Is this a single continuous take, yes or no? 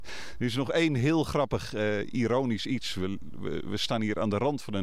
yes